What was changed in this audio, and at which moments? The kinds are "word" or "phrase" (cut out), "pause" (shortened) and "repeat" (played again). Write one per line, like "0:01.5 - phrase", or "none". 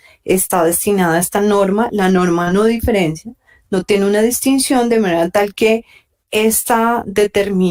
none